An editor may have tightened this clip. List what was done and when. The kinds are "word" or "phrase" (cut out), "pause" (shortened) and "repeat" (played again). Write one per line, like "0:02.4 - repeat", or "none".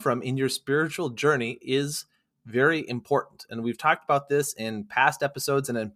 none